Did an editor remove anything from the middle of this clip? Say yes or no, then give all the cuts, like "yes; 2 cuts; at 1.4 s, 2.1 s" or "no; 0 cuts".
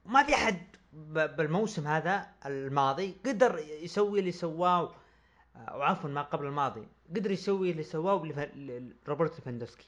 no; 0 cuts